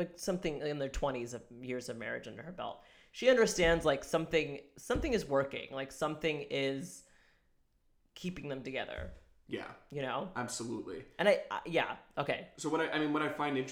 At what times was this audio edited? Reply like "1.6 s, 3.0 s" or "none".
none